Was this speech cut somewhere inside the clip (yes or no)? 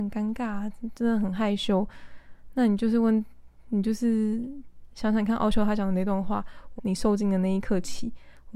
yes